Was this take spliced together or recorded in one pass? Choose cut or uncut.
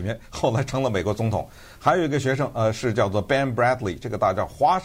uncut